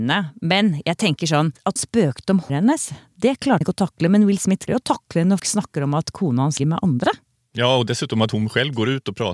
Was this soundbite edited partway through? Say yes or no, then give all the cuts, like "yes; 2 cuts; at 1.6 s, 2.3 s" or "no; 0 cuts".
yes; 6 cuts; at 1.8 s, 2.5 s, 3.6 s, 4.7 s, 5.4 s, 6.6 s